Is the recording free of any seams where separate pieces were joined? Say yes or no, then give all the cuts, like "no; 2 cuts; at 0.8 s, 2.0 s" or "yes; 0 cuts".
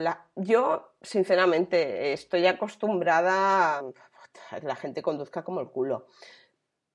no; 1 cut; at 3.8 s